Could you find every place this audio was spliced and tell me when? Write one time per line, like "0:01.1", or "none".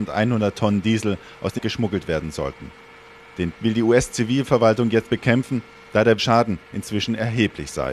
0:01.6
0:03.5
0:05.0
0:06.2